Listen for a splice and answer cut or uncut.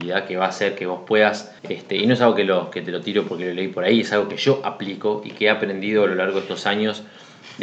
cut